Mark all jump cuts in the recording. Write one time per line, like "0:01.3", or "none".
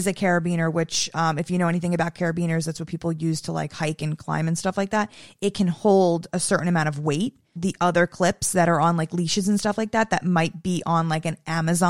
0:07.6